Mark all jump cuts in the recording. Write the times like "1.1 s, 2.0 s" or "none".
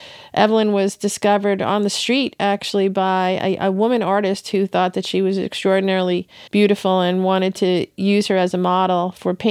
6.5 s